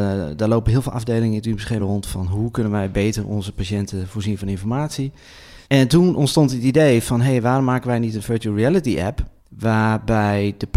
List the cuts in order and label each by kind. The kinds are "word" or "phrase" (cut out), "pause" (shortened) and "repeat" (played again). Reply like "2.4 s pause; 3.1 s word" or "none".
1.8 s word; 5.6 s pause; 9.4 s pause